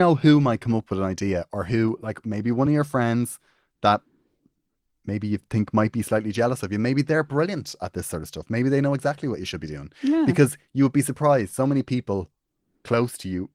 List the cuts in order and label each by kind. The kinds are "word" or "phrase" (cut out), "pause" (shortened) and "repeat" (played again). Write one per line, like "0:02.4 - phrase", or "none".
none